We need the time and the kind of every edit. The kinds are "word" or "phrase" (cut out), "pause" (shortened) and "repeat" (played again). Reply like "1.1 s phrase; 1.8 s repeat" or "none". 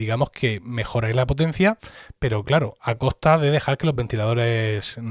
none